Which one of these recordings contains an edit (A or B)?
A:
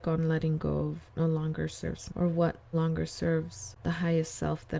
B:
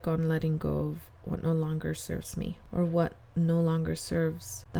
A